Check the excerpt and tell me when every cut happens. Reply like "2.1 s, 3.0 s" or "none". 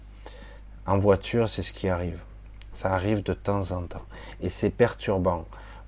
none